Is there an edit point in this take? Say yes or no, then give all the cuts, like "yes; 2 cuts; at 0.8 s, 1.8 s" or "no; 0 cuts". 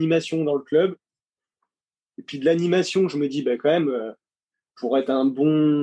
no; 0 cuts